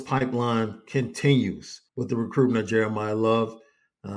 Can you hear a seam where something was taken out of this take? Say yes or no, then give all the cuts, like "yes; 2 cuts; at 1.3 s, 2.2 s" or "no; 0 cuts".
yes; 1 cut; at 1.9 s